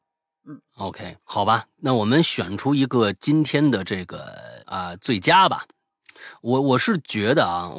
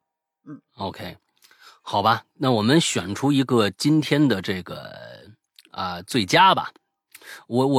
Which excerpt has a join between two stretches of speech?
first; 2 cuts; at 1.2 s, 4.6 s

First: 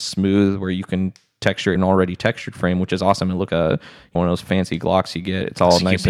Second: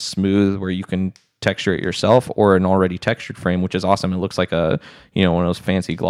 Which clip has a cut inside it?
first; 3 cuts; at 1.8 s, 3.5 s, 4.2 s

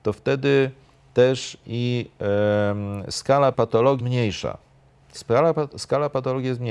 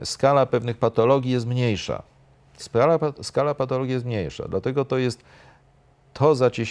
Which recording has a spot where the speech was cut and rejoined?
first; 2 cuts; at 3.5 s, 4.0 s

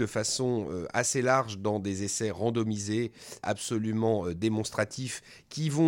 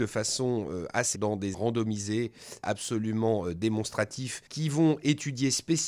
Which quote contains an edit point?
second; 3 cuts; at 1.1 s, 1.5 s, 4.5 s

